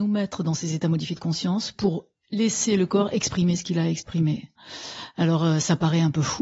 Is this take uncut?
yes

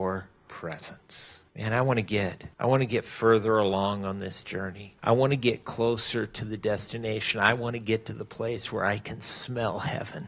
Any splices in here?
yes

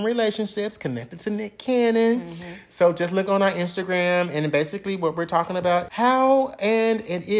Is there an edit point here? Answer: yes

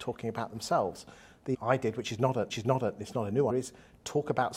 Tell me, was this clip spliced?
yes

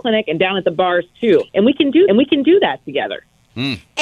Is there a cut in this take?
yes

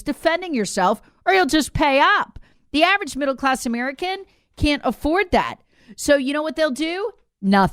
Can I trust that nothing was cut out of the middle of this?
yes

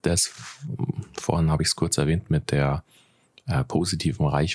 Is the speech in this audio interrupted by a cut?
no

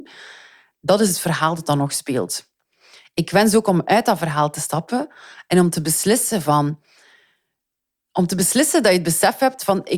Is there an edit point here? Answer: no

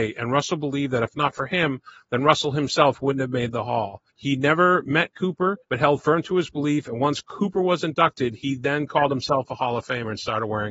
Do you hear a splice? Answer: yes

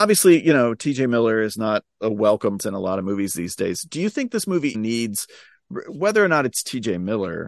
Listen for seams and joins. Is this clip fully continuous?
no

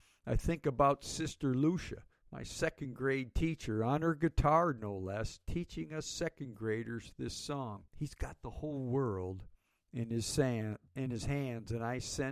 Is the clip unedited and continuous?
no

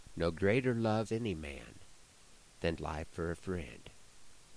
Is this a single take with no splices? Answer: no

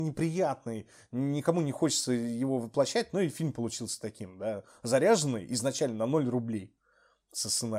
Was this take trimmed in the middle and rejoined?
no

